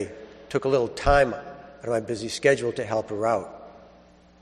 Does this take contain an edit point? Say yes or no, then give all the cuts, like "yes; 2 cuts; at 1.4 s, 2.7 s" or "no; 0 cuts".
no; 0 cuts